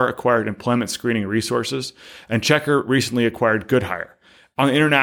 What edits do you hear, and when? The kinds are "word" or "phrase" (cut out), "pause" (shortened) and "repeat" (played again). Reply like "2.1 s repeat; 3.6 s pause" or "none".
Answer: none